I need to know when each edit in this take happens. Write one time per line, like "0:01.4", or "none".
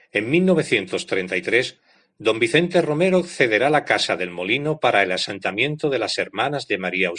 none